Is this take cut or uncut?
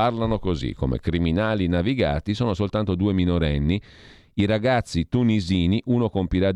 uncut